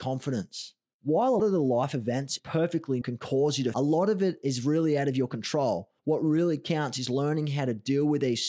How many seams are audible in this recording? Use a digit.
5